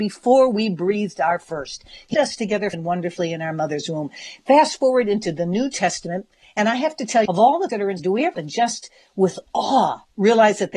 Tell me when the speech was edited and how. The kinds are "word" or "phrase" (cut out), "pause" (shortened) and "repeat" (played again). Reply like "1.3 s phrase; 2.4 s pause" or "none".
2.1 s word; 2.7 s word; 7.3 s word; 7.7 s word; 8.0 s word; 8.3 s word